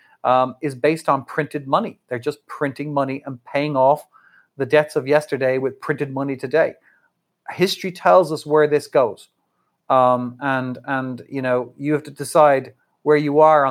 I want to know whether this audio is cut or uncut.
uncut